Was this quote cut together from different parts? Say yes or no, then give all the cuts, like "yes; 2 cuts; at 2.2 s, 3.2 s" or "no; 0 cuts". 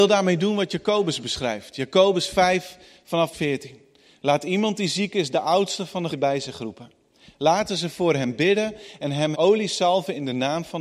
yes; 3 cuts; at 3.3 s, 6.1 s, 9.3 s